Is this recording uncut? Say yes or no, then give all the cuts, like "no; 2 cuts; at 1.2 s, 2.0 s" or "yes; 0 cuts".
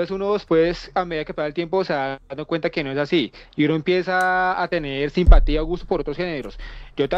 yes; 0 cuts